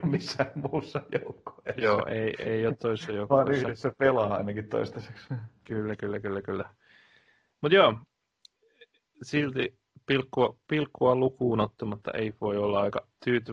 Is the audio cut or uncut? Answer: uncut